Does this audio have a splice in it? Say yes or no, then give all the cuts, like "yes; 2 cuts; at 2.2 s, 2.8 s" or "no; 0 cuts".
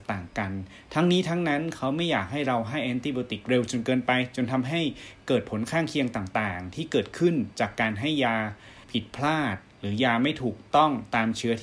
yes; 1 cut; at 8.8 s